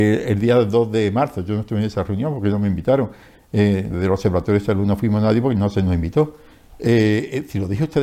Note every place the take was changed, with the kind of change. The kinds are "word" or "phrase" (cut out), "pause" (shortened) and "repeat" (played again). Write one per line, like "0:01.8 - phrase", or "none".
none